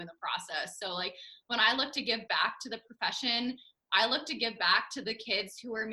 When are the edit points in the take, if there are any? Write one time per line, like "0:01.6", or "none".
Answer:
none